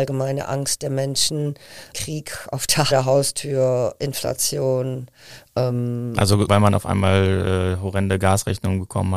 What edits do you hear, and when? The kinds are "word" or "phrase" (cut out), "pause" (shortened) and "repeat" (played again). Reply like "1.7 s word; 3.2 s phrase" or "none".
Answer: 1.9 s word; 2.9 s phrase; 6.5 s word